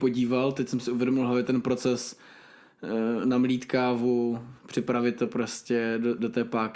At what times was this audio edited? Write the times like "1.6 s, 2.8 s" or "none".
4.6 s